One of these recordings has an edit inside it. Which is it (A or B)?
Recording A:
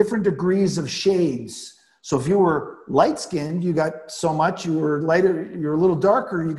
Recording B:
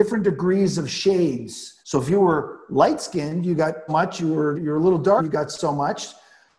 B